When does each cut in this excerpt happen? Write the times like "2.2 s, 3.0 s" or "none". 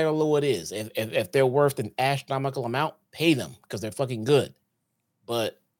none